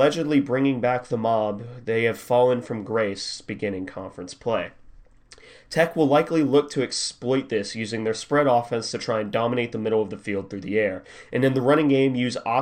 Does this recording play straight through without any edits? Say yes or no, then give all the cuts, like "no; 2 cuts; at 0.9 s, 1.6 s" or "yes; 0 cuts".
yes; 0 cuts